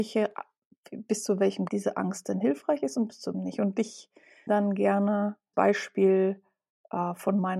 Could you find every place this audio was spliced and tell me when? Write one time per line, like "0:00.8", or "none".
0:01.7
0:03.3
0:04.5
0:05.5